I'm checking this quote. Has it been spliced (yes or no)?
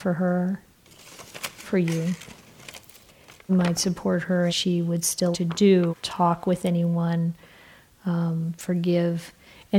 yes